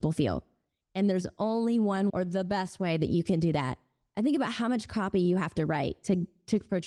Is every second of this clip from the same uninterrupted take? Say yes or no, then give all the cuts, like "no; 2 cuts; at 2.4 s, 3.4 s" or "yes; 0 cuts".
no; 1 cut; at 2.1 s